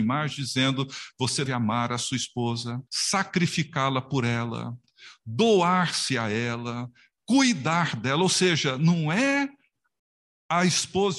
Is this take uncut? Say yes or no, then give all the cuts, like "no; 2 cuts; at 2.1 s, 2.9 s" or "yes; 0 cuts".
no; 2 cuts; at 1.5 s, 2.9 s